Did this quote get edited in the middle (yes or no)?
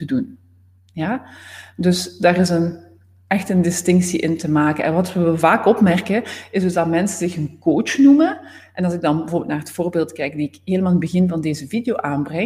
no